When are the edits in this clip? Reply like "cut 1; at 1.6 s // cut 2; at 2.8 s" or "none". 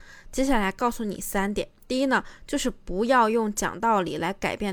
cut 1; at 1.8 s